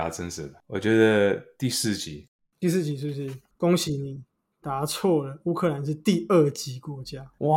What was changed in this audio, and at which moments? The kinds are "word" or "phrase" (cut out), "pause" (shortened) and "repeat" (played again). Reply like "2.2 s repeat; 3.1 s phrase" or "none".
none